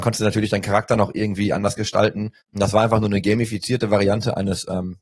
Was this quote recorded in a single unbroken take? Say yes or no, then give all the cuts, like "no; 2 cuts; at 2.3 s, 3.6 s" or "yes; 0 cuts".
no; 1 cut; at 2.4 s